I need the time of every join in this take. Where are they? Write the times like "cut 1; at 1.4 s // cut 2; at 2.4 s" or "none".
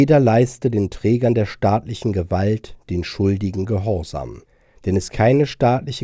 cut 1; at 5.1 s